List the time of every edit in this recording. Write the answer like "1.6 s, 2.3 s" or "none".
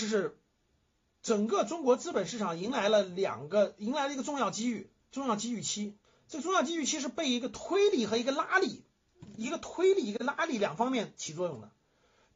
6.0 s